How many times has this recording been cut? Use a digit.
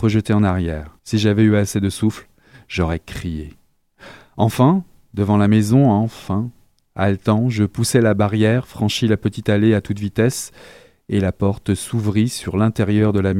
1